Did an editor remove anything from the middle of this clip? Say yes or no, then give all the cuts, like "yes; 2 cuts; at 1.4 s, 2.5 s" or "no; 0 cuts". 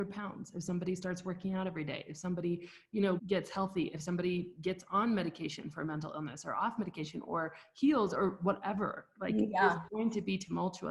yes; 1 cut; at 3.2 s